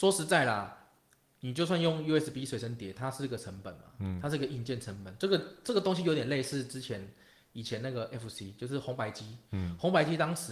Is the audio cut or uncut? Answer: uncut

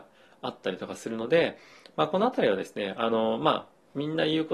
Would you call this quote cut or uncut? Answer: uncut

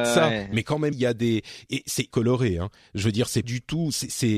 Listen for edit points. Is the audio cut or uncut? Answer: cut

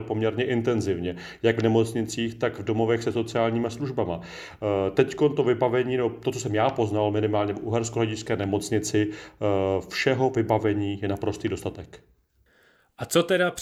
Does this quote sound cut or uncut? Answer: uncut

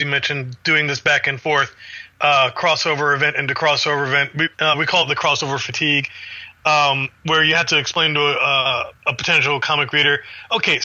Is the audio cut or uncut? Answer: cut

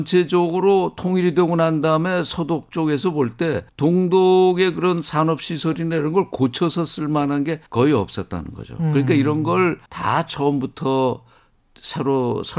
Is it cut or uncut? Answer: cut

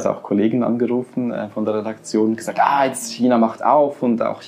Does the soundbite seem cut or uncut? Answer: uncut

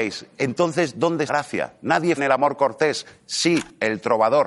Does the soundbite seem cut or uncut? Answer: cut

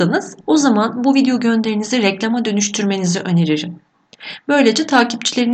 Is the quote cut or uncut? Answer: uncut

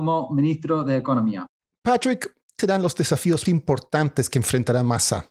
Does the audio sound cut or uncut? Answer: cut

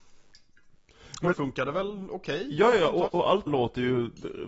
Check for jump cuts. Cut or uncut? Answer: cut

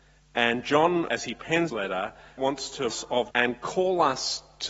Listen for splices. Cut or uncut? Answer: cut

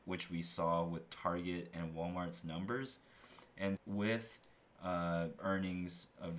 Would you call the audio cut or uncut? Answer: cut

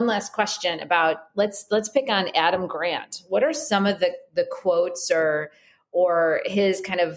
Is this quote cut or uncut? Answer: uncut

